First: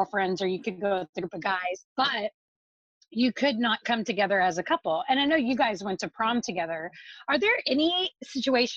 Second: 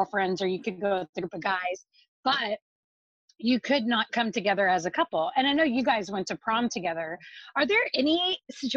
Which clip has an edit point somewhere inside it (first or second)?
first